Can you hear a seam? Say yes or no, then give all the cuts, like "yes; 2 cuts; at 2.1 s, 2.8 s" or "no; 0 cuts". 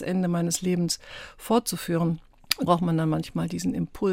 yes; 1 cut; at 2.7 s